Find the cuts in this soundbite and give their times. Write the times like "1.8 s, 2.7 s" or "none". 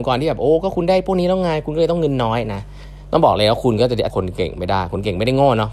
4.1 s